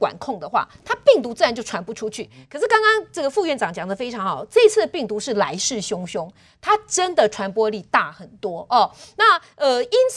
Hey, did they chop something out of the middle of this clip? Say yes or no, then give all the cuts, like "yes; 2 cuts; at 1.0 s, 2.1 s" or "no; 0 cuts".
no; 0 cuts